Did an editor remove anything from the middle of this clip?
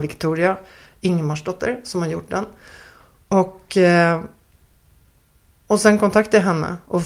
no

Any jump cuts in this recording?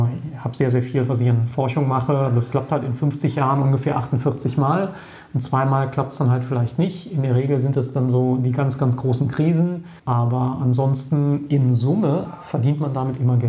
yes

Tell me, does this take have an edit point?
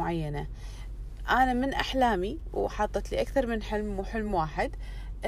no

